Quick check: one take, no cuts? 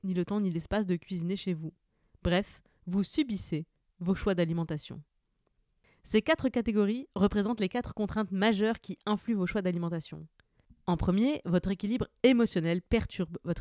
yes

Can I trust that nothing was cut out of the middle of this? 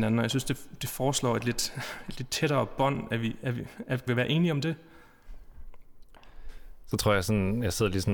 no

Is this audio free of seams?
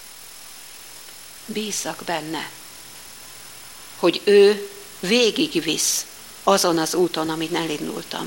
yes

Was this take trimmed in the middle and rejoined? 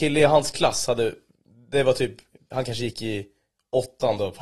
no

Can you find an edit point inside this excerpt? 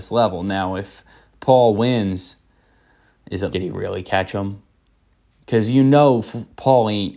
yes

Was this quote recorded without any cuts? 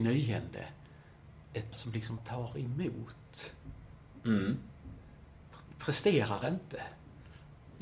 no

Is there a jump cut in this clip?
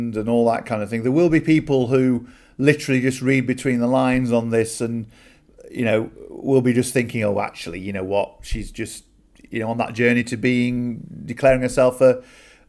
no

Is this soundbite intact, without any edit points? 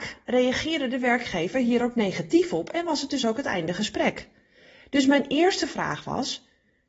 yes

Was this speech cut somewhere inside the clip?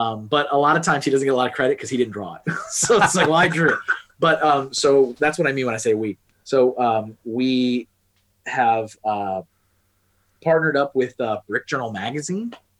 no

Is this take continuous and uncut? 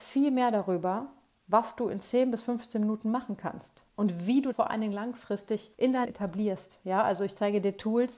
no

